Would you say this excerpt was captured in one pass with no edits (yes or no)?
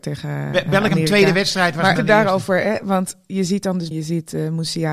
no